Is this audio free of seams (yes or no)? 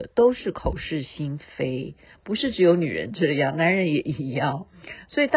yes